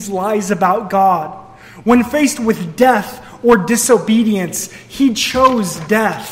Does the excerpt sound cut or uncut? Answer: uncut